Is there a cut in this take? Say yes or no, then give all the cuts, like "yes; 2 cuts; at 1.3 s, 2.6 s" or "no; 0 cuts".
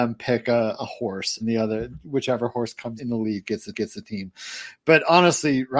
yes; 3 cuts; at 1.4 s, 3.0 s, 3.7 s